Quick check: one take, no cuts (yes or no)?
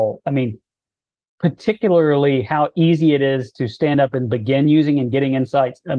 yes